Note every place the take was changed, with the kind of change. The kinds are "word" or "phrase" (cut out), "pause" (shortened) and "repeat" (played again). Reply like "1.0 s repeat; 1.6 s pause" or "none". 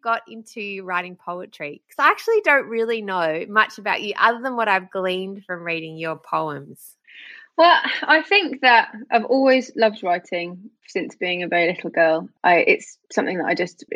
none